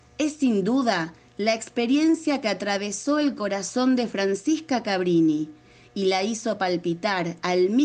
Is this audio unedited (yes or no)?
yes